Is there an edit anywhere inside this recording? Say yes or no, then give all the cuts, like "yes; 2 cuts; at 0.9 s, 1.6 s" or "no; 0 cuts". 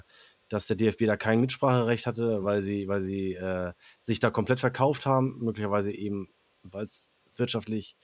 no; 0 cuts